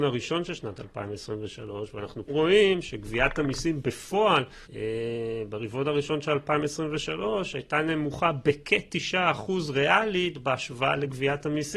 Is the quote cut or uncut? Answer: cut